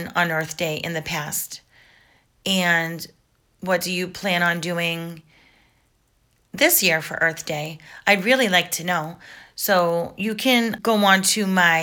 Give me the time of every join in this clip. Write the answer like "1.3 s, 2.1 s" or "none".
none